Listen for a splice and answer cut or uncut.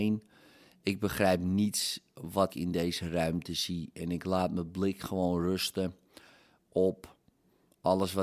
cut